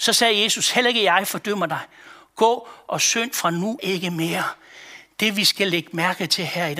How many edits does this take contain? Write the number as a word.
one